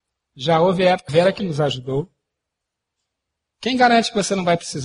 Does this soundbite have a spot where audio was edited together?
yes; 2 cuts; at 1.1 s, 1.4 s

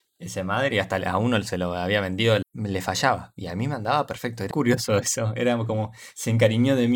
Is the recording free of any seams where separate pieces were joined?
no; 2 cuts; at 2.4 s, 4.5 s

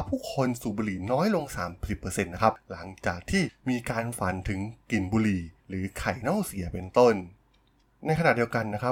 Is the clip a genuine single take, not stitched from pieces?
no; 1 cut; at 5.6 s

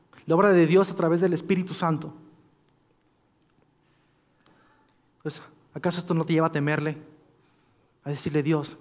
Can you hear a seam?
no; 0 cuts

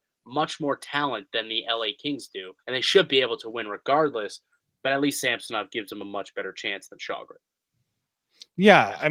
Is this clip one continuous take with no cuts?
no; 1 cut; at 2.6 s

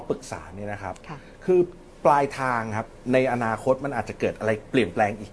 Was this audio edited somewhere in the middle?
no; 0 cuts

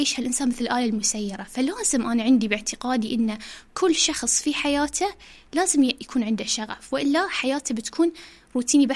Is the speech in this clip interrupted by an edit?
no; 0 cuts

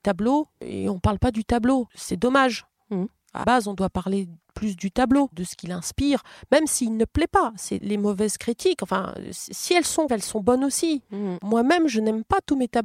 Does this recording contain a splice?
yes; 4 cuts; at 3.4 s, 5.3 s, 7.8 s, 10.1 s

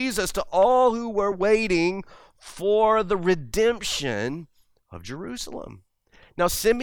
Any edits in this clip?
no; 0 cuts

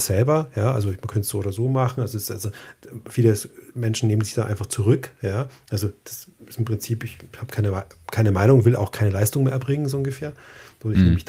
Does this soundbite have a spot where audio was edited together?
no; 0 cuts

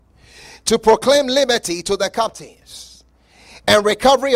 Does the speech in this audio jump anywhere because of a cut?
no; 0 cuts

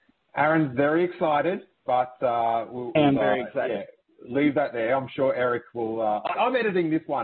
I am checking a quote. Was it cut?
yes; 2 cuts; at 3.0 s, 6.4 s

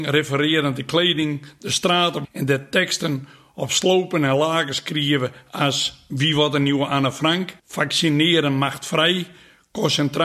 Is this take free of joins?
no; 2 cuts; at 2.2 s, 7.6 s

